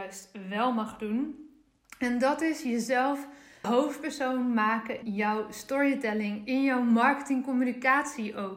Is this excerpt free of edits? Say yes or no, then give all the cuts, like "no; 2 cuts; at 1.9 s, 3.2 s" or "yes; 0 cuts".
no; 2 cuts; at 3.6 s, 5.0 s